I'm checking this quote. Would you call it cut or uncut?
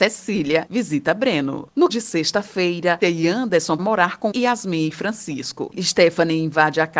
cut